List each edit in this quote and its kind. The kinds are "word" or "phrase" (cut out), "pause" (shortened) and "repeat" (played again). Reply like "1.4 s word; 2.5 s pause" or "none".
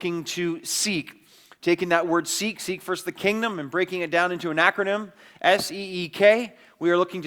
none